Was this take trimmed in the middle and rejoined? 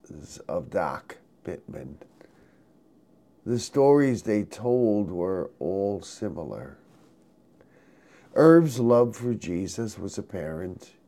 no; 0 cuts

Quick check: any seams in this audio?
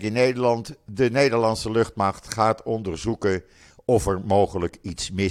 no; 0 cuts

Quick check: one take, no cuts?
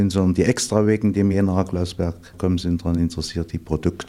yes; 0 cuts

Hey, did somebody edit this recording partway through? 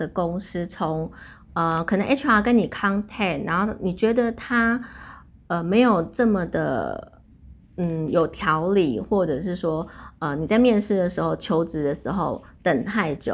no; 0 cuts

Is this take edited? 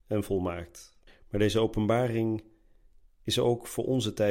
yes; 1 cut; at 1.1 s

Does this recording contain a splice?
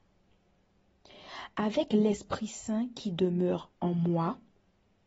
no; 0 cuts

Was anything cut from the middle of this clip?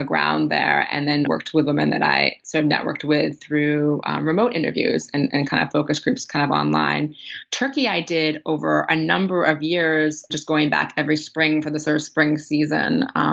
yes; 2 cuts; at 1.2 s, 10.3 s

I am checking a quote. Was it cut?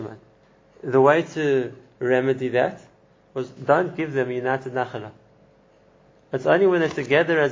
no; 0 cuts

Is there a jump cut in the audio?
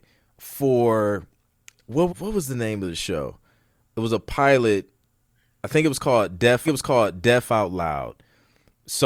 yes; 2 cuts; at 2.1 s, 6.7 s

